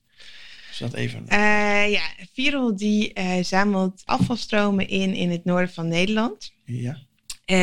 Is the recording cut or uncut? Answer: cut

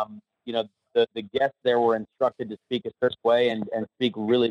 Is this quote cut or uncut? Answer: uncut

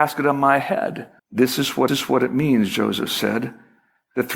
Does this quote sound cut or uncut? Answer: cut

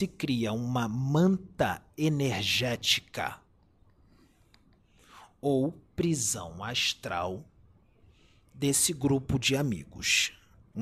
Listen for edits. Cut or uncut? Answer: uncut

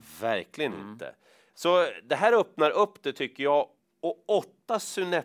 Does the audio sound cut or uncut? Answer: uncut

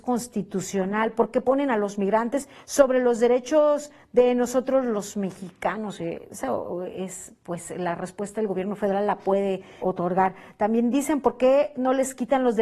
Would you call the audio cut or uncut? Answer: cut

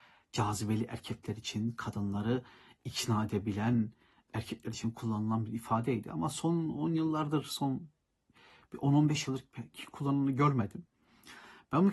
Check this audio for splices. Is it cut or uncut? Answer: uncut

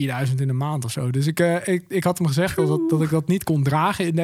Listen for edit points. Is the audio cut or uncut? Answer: uncut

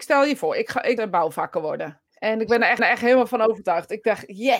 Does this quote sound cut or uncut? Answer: cut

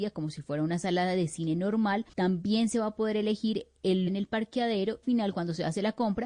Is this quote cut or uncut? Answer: cut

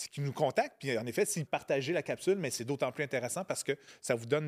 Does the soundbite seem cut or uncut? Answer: cut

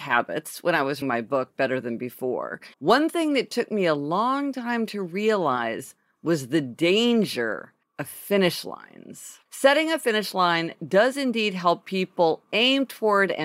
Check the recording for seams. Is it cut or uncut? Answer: cut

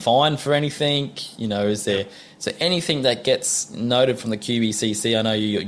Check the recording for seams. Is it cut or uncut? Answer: uncut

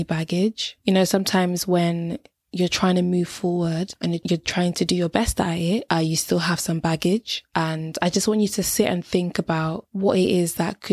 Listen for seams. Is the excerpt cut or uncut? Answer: uncut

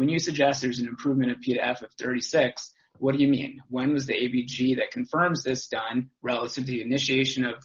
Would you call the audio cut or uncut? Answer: uncut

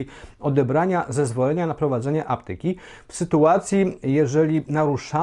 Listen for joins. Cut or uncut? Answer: uncut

